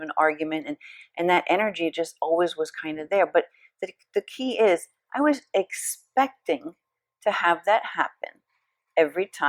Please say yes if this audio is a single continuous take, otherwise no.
yes